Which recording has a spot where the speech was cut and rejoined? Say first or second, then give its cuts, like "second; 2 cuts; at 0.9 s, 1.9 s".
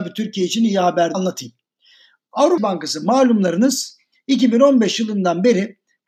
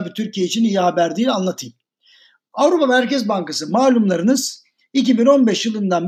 first; 2 cuts; at 1.1 s, 2.6 s